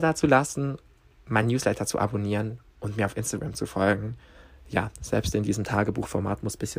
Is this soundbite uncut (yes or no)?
yes